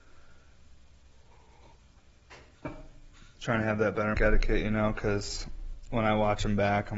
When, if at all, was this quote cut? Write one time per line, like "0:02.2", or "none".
0:02.5
0:04.1